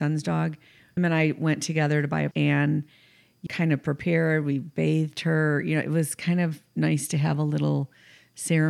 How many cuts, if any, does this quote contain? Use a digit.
3